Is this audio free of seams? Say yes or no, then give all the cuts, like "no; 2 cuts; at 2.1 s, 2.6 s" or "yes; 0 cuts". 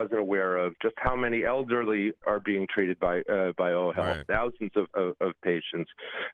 no; 2 cuts; at 2.2 s, 4.9 s